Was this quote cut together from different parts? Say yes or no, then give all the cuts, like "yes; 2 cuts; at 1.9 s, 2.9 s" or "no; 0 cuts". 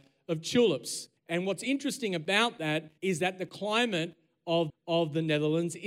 yes; 3 cuts; at 1.2 s, 3.0 s, 4.7 s